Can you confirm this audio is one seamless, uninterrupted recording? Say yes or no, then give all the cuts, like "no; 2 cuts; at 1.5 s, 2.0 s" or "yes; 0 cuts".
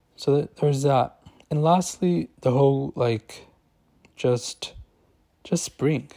no; 1 cut; at 2.3 s